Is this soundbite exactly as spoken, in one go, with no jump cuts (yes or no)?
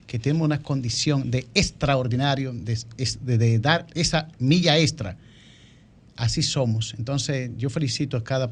yes